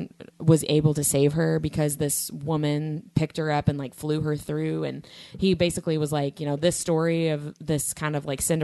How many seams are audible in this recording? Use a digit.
0